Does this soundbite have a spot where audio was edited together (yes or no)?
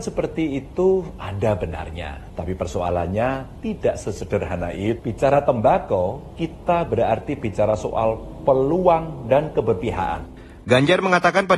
no